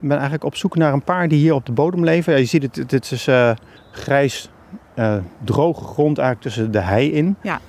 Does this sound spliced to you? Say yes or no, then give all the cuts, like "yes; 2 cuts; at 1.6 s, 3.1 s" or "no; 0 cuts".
yes; 1 cut; at 3.8 s